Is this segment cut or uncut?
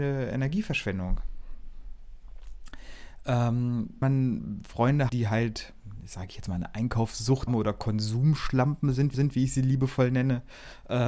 cut